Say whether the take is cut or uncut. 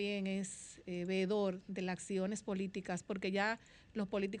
uncut